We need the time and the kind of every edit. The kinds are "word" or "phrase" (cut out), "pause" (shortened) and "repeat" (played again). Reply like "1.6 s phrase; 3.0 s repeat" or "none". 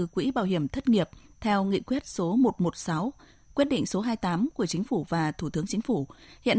none